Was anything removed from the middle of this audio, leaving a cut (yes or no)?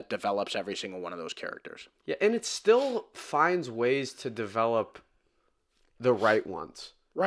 no